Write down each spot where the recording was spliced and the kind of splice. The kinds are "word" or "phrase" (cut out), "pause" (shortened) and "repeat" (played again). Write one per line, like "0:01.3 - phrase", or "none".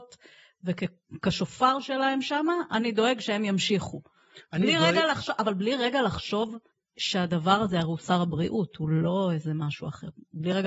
0:06.7 - pause